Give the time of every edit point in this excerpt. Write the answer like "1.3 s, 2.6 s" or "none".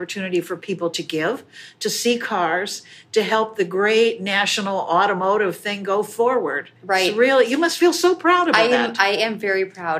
6.8 s